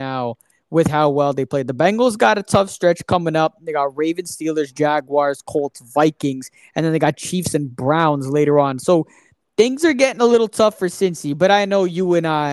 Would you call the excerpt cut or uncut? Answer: uncut